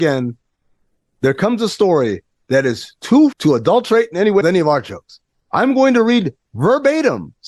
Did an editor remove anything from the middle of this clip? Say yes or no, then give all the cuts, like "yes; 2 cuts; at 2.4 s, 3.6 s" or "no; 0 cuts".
yes; 2 cuts; at 3.3 s, 4.4 s